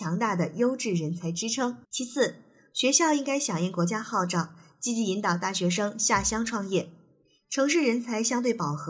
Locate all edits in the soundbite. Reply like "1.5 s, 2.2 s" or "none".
1.8 s